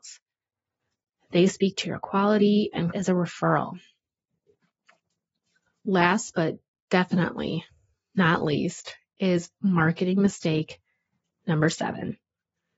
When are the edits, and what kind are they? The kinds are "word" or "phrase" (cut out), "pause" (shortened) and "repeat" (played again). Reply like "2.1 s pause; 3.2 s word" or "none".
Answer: 2.9 s phrase

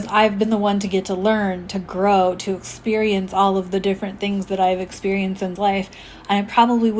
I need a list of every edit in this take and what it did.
5.6 s word

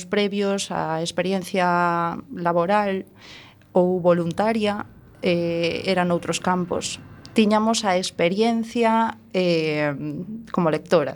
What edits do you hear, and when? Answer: none

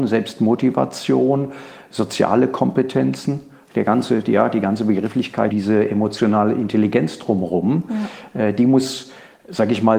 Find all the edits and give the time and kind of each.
5.5 s word

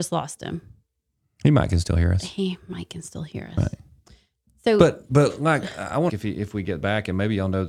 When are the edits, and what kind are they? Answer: 6.1 s phrase

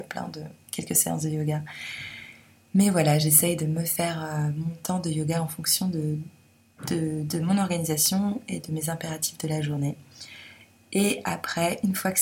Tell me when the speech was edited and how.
none

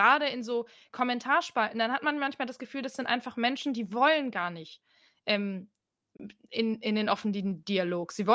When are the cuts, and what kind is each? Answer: none

